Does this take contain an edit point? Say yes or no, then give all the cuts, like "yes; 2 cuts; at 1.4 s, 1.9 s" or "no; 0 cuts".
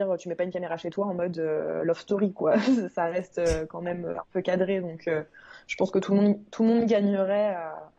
no; 0 cuts